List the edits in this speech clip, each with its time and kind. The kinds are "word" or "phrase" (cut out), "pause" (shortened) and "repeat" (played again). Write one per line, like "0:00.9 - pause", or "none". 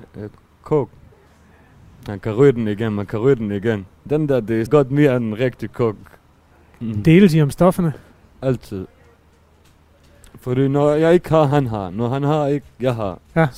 0:04.7 - word